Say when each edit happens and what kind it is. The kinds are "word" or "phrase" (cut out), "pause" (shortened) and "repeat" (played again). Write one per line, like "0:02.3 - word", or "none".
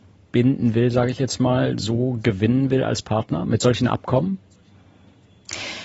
none